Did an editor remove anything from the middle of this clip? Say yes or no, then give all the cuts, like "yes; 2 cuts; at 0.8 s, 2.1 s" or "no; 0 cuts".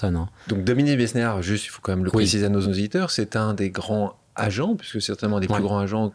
yes; 1 cut; at 2.6 s